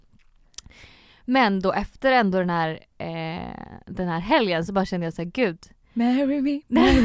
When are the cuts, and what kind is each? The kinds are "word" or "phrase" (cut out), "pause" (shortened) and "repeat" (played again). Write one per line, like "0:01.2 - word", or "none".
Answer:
none